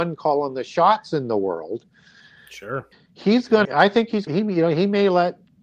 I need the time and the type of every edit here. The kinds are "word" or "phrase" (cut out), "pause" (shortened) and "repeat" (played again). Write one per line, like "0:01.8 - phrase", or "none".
0:02.9 - word
0:03.6 - word
0:04.3 - word